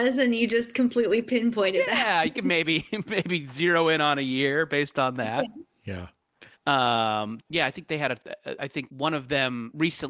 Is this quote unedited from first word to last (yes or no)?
no